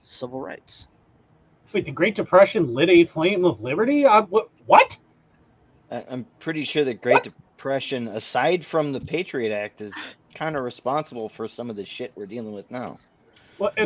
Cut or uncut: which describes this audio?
uncut